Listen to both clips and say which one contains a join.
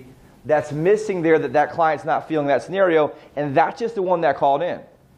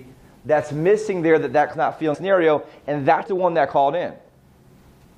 second; 3 cuts; at 1.7 s, 2.1 s, 3.3 s

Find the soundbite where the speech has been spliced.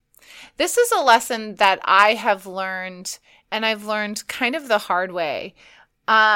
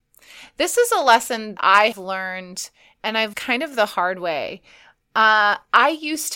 second; 3 cuts; at 1.6 s, 1.9 s, 3.3 s

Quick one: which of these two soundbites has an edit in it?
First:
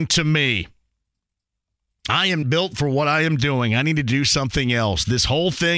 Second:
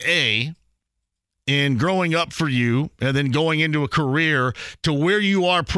first; 1 cut; at 2.4 s

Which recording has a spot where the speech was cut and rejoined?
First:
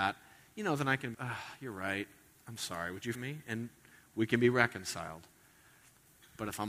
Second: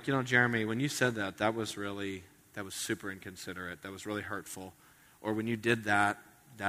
first; 3 cuts; at 1.1 s, 2.6 s, 3.1 s

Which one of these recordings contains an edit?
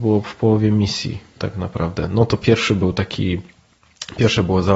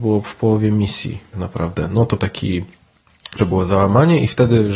second; 3 cuts; at 1.3 s, 2.2 s, 3.4 s

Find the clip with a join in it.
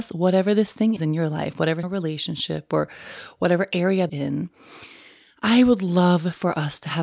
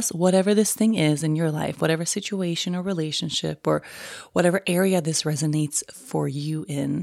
first; 3 cuts; at 1.0 s, 1.8 s, 4.1 s

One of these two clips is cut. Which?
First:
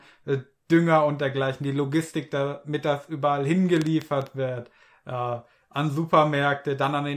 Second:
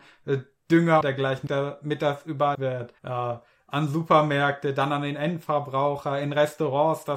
second; 4 cuts; at 1.0 s, 1.5 s, 2.5 s, 3.0 s

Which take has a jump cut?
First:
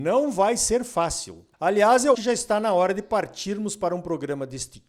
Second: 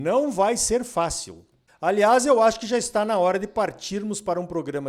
first; 2 cuts; at 1.5 s, 2.1 s

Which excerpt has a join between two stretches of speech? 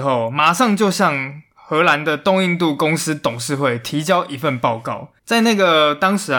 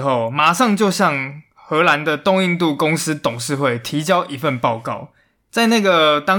first; 1 cut; at 5.2 s

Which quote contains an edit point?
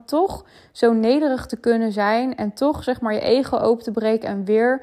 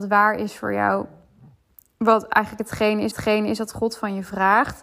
second; 1 cut; at 3.1 s

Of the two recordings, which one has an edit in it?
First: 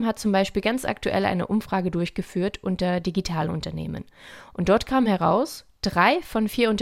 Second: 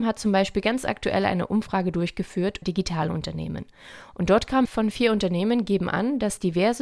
second; 2 cuts; at 2.6 s, 4.6 s

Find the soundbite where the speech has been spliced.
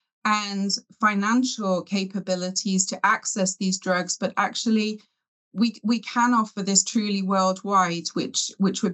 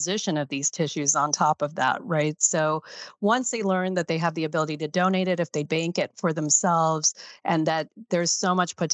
second; 1 cut; at 5.6 s

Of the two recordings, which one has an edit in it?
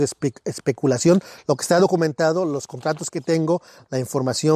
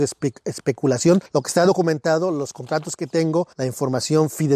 second; 2 cuts; at 1.3 s, 3.5 s

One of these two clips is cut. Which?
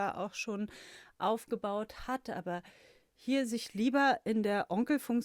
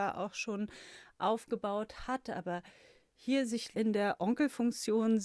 second; 1 cut; at 3.7 s

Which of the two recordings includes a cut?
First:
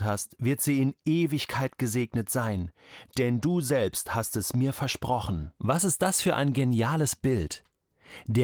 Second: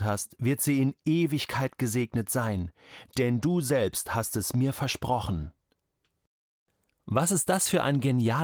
first; 1 cut; at 5.6 s

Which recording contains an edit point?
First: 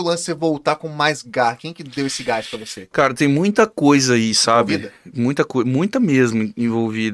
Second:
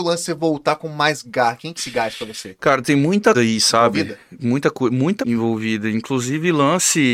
second; 3 cuts; at 1.8 s, 3.3 s, 5.2 s

